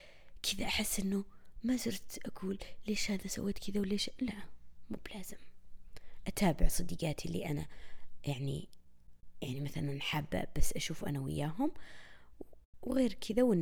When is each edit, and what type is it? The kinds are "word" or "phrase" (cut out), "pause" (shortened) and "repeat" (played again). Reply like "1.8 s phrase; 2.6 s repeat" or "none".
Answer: none

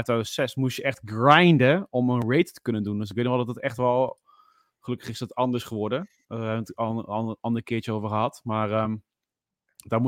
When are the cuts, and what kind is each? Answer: none

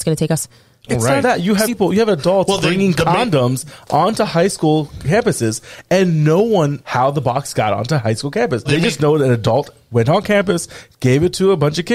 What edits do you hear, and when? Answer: 1.2 s word; 1.7 s word; 6.8 s word; 8.7 s word

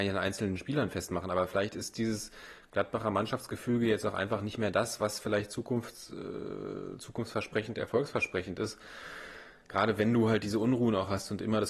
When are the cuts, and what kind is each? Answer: none

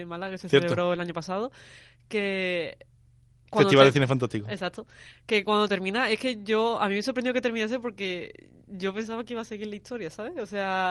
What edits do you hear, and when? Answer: none

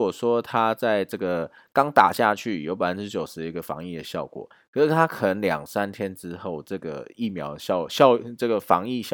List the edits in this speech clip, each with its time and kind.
none

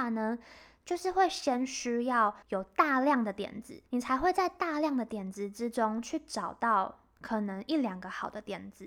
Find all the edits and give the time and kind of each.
2.4 s pause; 3.9 s pause

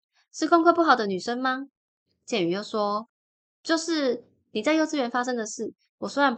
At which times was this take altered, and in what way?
1.8 s pause; 3.2 s pause

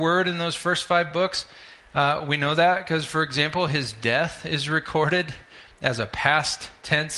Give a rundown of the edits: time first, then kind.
none

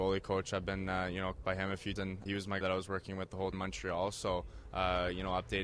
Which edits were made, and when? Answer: 1.4 s word; 2.0 s word; 2.3 s word; 2.6 s word; 3.5 s word

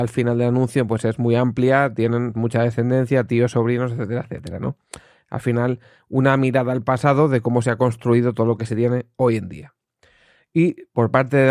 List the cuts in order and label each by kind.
2.3 s word; 4.2 s word

